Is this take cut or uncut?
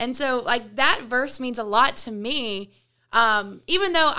uncut